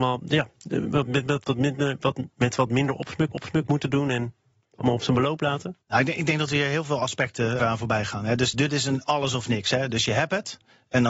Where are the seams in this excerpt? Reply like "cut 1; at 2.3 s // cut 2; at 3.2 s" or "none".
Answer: cut 1; at 3.3 s // cut 2; at 5.8 s // cut 3; at 7.6 s // cut 4; at 8.5 s